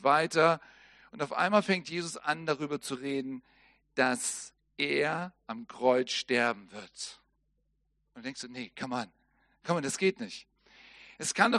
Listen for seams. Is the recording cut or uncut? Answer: uncut